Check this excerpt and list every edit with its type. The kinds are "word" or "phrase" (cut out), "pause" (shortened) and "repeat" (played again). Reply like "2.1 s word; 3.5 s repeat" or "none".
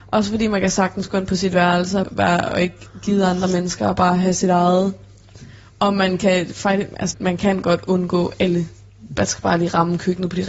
2.0 s word; 7.1 s word